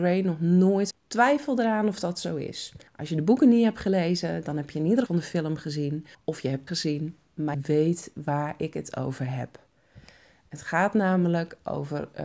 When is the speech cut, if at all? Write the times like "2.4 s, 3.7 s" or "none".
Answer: 0.9 s, 2.9 s, 5.1 s, 6.1 s, 6.7 s, 7.5 s